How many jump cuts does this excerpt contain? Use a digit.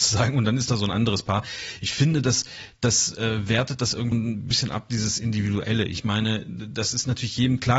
1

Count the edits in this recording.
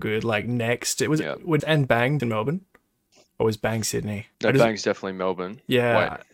3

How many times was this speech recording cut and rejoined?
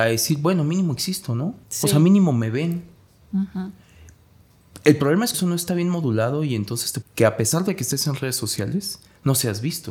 3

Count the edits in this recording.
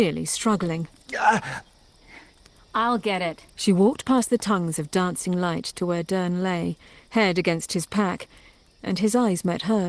0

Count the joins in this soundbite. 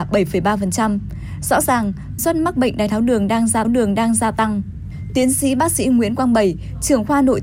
2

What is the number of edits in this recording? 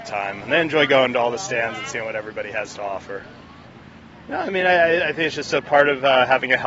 0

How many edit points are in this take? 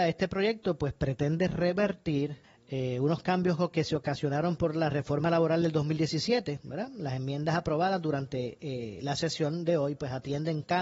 1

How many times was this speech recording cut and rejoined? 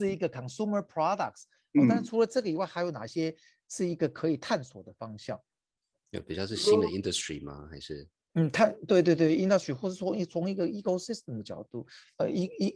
0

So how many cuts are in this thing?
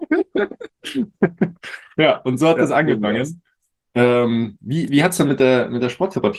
0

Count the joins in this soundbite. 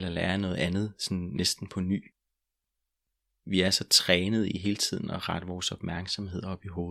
0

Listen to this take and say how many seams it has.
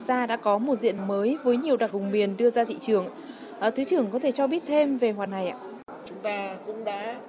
3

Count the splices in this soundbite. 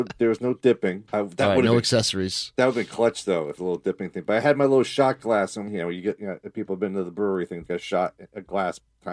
4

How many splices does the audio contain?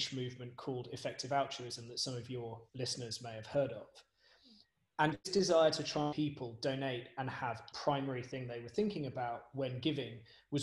4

